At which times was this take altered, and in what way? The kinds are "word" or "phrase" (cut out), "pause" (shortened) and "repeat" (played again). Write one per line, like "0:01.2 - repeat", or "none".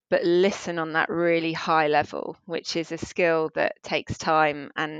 none